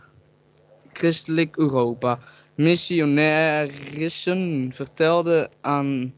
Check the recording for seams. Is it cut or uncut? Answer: uncut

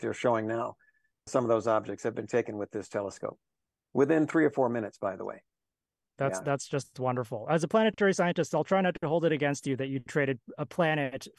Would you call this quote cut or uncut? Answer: uncut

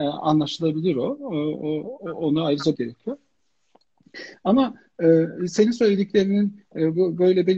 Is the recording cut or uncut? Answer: cut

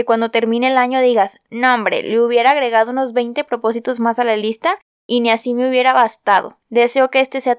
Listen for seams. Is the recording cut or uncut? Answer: cut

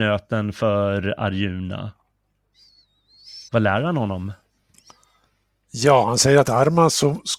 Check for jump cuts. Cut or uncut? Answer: cut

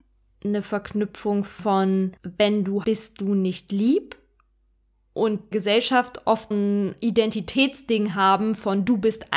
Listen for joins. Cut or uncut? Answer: cut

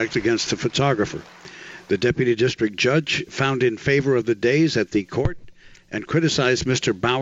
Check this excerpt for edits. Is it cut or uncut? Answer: uncut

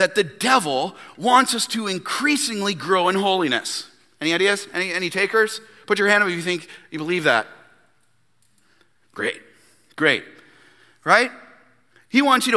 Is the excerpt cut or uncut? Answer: uncut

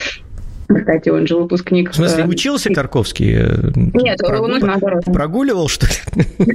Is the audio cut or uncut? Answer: cut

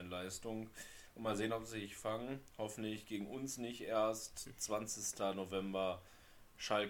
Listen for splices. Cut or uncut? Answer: uncut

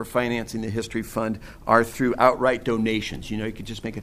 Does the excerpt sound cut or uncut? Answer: uncut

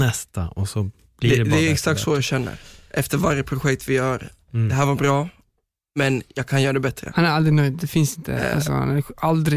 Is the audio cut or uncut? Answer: uncut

